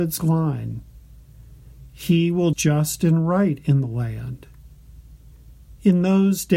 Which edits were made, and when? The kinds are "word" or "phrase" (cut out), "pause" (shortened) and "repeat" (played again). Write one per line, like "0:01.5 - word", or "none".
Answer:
0:02.5 - phrase